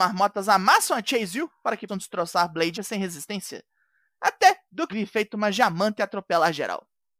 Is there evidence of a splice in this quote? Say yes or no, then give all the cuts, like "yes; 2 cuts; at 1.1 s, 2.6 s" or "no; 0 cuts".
yes; 3 cuts; at 1.9 s, 2.7 s, 4.9 s